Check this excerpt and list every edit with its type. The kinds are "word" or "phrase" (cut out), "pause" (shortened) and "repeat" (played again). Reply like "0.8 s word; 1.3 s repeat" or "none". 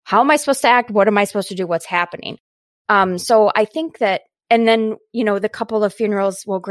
none